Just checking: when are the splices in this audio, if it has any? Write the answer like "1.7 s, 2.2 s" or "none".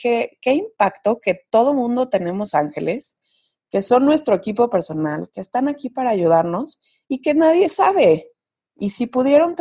none